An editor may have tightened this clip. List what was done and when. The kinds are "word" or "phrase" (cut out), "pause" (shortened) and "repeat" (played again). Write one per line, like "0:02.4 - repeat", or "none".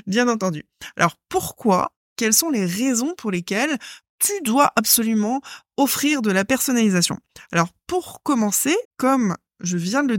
0:08.8 - pause